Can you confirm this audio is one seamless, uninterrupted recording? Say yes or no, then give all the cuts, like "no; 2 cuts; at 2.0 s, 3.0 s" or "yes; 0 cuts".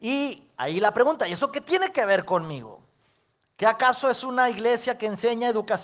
yes; 0 cuts